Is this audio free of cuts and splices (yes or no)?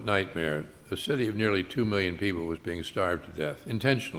yes